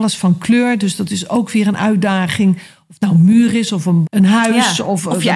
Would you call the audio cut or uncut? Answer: cut